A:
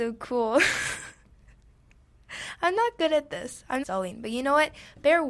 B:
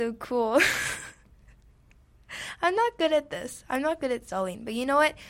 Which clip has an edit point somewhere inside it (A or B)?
A